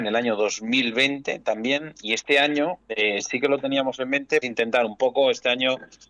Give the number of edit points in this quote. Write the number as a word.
two